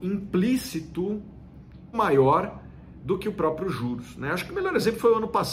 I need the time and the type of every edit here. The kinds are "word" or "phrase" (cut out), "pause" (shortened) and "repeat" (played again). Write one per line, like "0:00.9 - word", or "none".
0:01.9 - word